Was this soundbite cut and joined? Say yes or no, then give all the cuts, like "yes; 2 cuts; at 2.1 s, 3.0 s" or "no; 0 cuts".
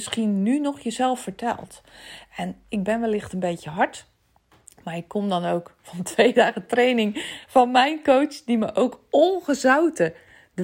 no; 0 cuts